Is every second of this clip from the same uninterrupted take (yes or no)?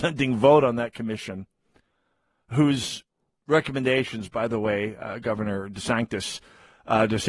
yes